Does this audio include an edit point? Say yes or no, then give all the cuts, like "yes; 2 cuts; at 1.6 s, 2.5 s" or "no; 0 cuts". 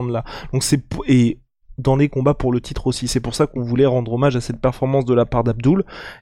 no; 0 cuts